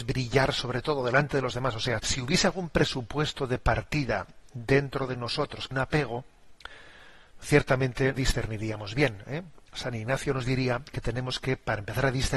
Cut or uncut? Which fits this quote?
cut